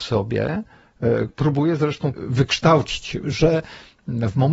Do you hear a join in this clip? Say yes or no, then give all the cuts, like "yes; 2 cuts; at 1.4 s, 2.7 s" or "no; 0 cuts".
yes; 2 cuts; at 1.3 s, 2.1 s